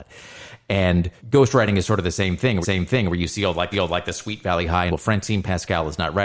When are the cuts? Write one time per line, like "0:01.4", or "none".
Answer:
0:01.2
0:02.6
0:03.7
0:04.9